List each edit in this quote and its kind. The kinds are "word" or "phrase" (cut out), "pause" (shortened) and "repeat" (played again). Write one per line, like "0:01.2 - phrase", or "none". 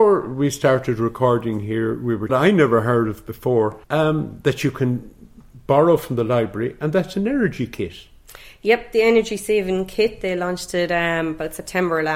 0:02.3 - phrase
0:03.8 - pause